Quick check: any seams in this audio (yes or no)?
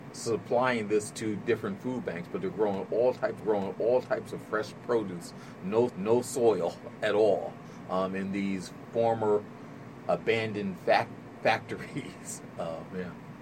yes